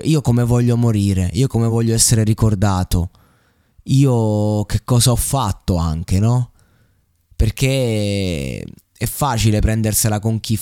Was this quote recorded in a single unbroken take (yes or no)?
yes